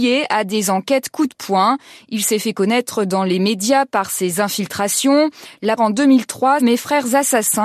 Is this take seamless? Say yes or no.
no